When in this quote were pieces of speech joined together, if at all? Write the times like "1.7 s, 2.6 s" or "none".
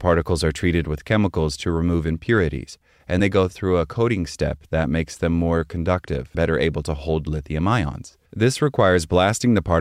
3.2 s, 6.3 s, 8.3 s